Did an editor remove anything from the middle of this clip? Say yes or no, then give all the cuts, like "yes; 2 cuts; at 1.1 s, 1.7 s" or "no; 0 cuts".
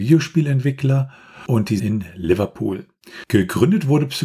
yes; 1 cut; at 1.8 s